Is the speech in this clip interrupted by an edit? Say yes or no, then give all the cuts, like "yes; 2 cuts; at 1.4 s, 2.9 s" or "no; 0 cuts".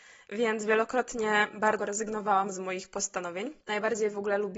yes; 2 cuts; at 1.8 s, 3.6 s